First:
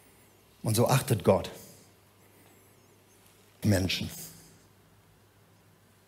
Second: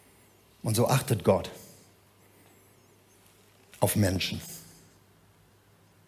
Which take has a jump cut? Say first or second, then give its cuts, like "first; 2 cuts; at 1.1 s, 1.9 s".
first; 1 cut; at 3.6 s